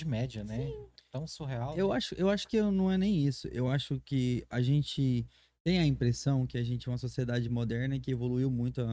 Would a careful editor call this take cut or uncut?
uncut